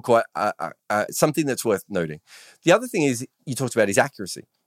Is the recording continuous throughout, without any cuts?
no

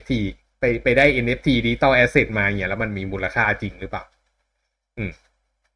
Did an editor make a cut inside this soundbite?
no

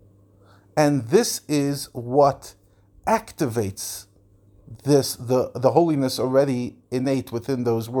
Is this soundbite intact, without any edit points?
yes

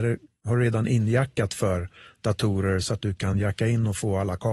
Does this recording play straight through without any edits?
yes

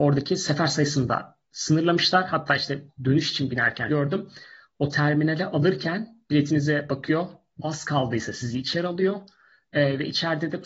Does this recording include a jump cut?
yes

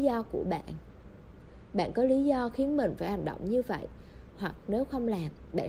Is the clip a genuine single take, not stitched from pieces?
yes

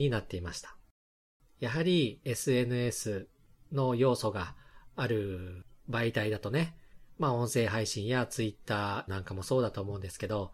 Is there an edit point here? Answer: yes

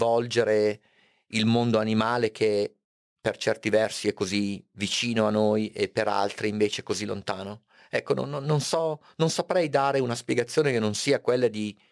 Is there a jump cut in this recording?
no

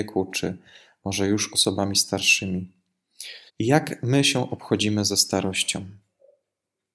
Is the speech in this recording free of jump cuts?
no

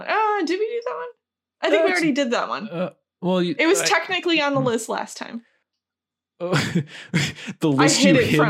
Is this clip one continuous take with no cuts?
no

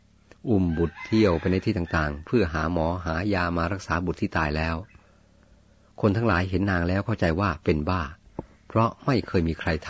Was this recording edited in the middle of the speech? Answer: no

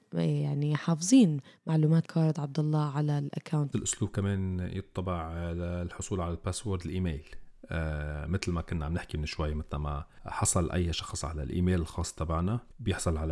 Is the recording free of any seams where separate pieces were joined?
no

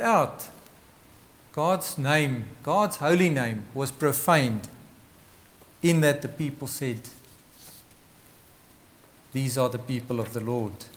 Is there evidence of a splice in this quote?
no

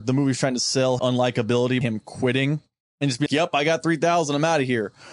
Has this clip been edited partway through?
yes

